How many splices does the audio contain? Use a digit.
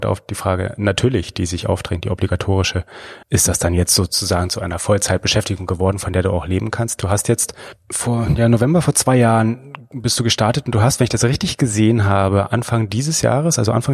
1